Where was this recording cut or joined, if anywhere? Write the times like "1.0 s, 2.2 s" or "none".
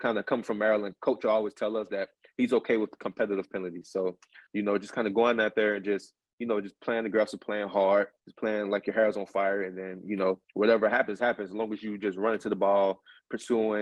4.5 s, 8.2 s, 10.4 s